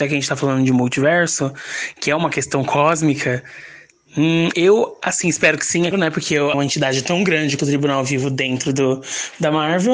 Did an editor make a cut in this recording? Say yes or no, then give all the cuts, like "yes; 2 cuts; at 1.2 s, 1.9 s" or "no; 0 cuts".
yes; 4 cuts; at 4.5 s, 5.9 s, 6.5 s, 7.6 s